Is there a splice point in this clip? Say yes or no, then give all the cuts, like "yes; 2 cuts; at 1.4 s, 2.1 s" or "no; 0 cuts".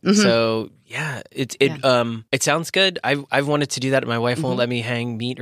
yes; 1 cut; at 2.3 s